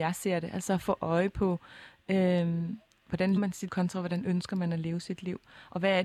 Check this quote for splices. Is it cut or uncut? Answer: cut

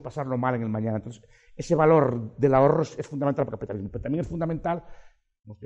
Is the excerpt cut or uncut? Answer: uncut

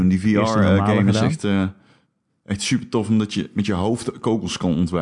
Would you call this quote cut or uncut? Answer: uncut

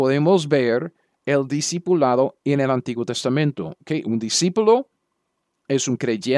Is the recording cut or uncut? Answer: uncut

